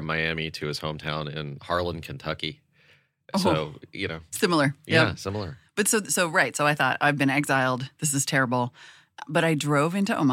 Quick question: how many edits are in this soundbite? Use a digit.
0